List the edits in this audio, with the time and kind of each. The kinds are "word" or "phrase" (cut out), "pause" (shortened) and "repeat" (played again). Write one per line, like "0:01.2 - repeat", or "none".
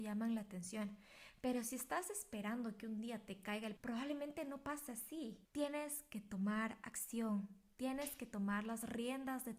0:03.8 - phrase
0:05.4 - pause